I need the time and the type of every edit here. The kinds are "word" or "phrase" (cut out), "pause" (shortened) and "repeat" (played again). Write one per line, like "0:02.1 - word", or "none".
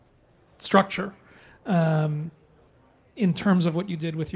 none